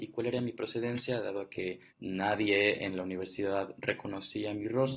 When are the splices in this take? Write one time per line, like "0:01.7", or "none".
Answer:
0:01.9

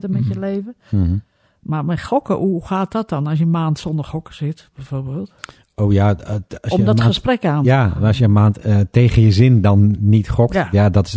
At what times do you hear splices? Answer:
none

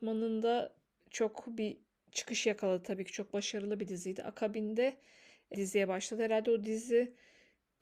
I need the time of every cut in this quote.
0:05.5

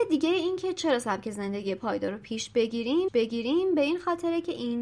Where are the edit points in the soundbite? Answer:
0:03.1

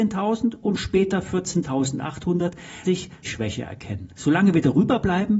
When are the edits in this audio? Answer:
0:02.8
0:03.2

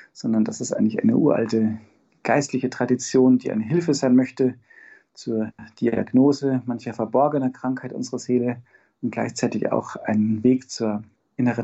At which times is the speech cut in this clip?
none

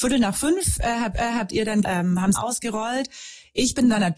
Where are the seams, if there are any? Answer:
0:01.1
0:01.8
0:02.3

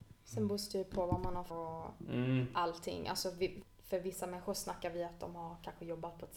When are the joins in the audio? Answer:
0:01.5
0:03.6

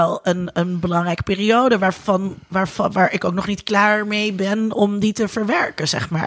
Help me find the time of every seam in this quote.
none

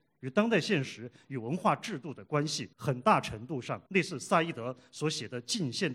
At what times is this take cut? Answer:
0:02.7
0:03.9

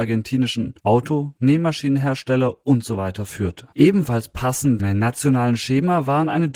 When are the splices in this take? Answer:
0:01.4
0:03.7
0:04.8

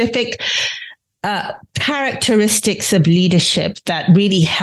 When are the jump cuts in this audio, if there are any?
none

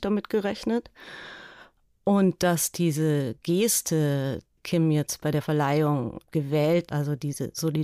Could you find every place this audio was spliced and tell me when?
0:04.6
0:06.9

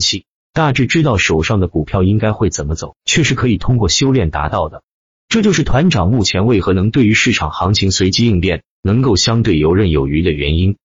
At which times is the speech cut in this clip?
none

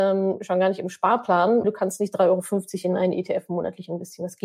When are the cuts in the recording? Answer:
0:01.6

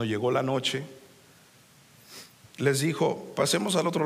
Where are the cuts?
none

